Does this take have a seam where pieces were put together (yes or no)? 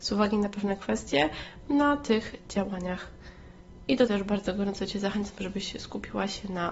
yes